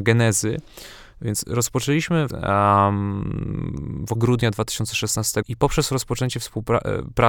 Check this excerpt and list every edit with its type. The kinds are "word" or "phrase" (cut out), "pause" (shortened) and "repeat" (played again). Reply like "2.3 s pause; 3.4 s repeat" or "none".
2.3 s phrase; 4.1 s word; 5.4 s word